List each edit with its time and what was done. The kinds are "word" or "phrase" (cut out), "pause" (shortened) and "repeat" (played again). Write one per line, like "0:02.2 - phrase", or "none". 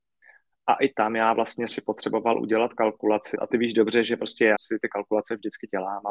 0:01.7 - word
0:03.3 - word
0:04.5 - word